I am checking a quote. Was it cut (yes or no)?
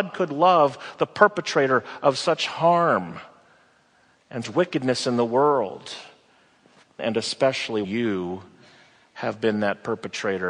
yes